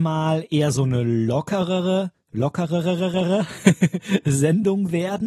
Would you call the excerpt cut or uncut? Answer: uncut